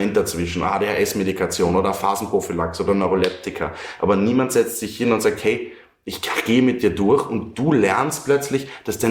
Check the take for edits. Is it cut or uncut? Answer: uncut